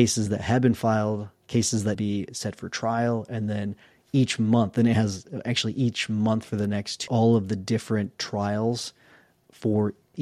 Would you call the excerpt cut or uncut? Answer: cut